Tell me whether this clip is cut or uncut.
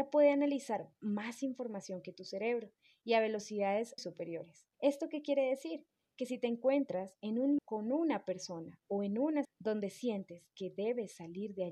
cut